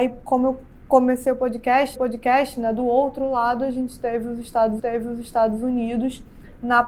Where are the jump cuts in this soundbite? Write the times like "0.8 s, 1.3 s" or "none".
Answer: 2.0 s, 4.8 s